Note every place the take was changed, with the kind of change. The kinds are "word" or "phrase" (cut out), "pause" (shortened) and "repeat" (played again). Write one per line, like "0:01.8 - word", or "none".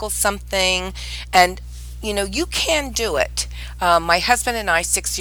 none